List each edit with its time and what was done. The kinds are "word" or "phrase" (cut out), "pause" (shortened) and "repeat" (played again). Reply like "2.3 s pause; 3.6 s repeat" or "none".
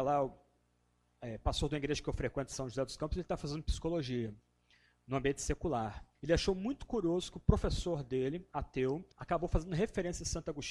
6.1 s pause; 9.1 s pause